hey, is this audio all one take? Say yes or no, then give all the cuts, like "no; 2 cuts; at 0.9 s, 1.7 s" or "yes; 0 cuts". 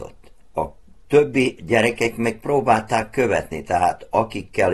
yes; 0 cuts